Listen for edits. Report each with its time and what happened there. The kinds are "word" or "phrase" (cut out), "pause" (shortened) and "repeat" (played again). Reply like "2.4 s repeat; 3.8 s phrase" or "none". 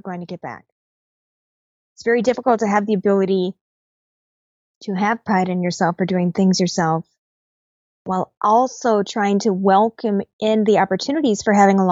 none